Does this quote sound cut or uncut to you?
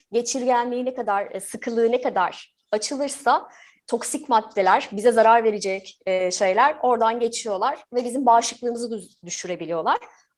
uncut